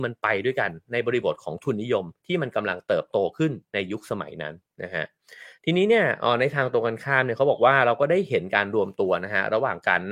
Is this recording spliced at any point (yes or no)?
yes